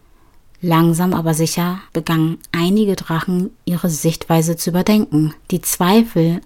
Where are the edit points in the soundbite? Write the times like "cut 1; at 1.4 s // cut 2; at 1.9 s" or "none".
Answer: cut 1; at 1.9 s // cut 2; at 5.4 s